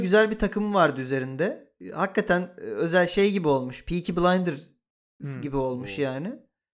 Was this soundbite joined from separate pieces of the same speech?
no; 0 cuts

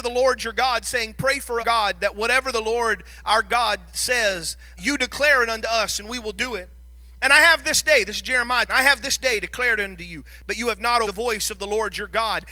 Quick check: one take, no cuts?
no; 4 cuts; at 1.6 s, 4.8 s, 8.7 s, 11.0 s

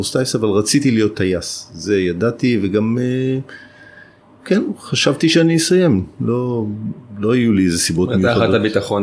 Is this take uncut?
yes; 0 cuts

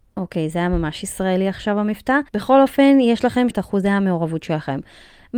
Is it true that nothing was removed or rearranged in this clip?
no; 2 cuts; at 2.3 s, 3.5 s

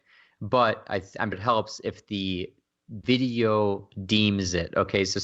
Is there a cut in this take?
yes; 1 cut; at 1.3 s

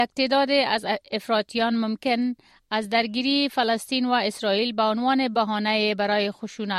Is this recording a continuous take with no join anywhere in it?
yes; 0 cuts

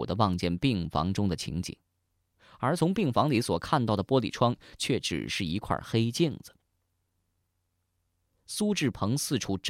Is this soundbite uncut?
yes; 0 cuts

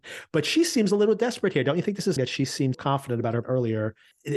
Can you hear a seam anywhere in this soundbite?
yes; 3 cuts; at 2.2 s, 2.7 s, 3.4 s

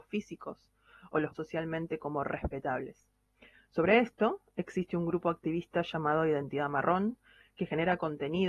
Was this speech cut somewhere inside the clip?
yes; 1 cut; at 1.3 s

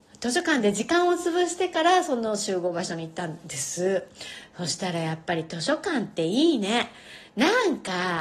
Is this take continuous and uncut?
yes; 0 cuts

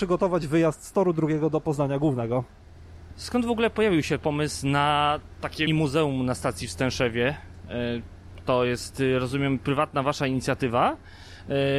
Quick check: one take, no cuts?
no; 1 cut; at 5.7 s

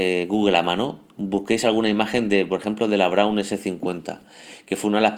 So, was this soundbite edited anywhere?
no; 0 cuts

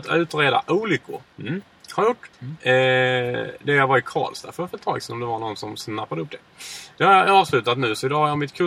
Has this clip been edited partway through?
yes; 2 cuts; at 1.3 s, 2.3 s

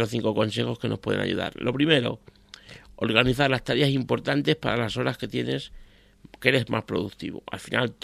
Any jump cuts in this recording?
no; 0 cuts

